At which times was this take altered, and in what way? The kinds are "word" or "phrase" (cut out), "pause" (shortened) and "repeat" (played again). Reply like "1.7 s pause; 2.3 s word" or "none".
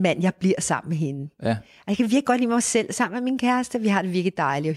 none